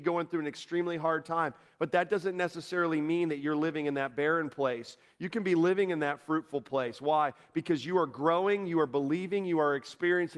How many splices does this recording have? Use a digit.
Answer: 0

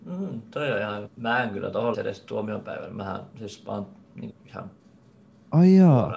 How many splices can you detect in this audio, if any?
3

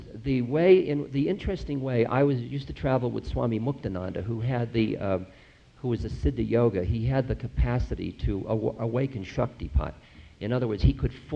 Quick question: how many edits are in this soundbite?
0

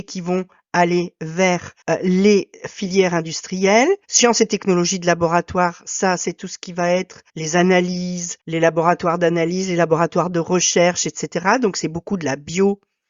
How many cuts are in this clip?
4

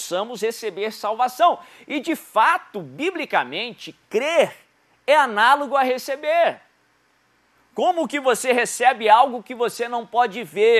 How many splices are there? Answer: 0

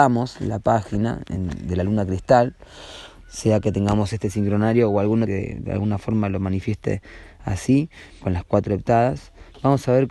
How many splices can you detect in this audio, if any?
2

